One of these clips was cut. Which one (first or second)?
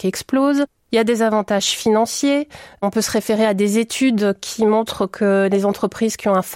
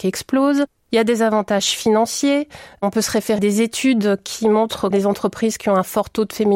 second